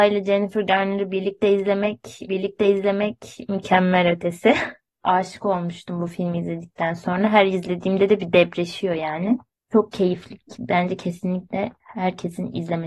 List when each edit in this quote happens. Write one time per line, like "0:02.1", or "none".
0:02.3
0:04.9